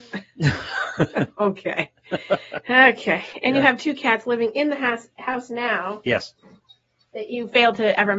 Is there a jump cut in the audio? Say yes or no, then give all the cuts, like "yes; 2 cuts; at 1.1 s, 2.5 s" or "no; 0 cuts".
no; 0 cuts